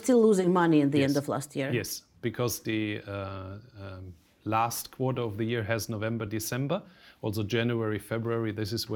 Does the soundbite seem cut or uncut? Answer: uncut